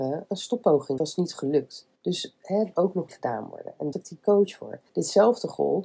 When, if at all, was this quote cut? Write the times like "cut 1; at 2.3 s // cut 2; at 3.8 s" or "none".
cut 1; at 1.0 s // cut 2; at 2.0 s // cut 3; at 2.8 s // cut 4; at 3.1 s // cut 5; at 3.9 s // cut 6; at 4.9 s